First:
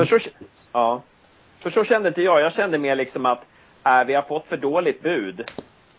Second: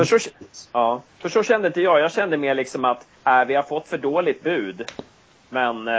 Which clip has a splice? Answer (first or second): second